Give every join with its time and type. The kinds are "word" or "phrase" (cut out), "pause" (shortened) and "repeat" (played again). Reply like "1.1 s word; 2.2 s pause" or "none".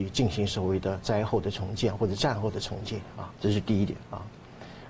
3.4 s pause